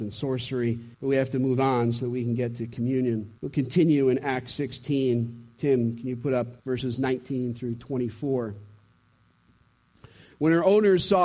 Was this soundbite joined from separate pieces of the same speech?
yes; 3 cuts; at 0.9 s, 3.4 s, 6.6 s

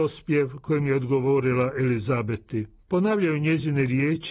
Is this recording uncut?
no; 1 cut; at 2.8 s

